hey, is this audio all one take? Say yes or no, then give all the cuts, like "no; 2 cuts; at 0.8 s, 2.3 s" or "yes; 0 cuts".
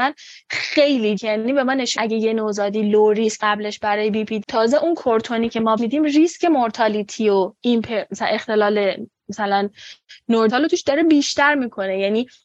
no; 6 cuts; at 1.2 s, 2.0 s, 3.4 s, 4.4 s, 5.8 s, 10.5 s